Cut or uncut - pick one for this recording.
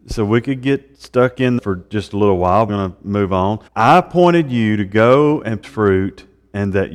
cut